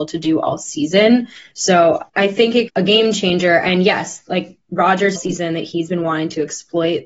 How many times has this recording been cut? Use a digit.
3